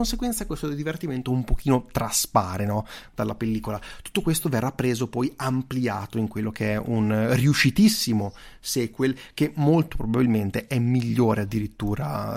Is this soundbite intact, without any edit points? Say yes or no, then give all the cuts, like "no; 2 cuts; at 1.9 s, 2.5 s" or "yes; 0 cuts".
yes; 0 cuts